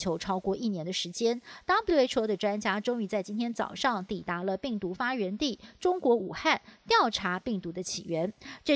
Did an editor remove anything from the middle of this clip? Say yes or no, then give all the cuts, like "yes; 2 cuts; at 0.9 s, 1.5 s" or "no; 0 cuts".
no; 0 cuts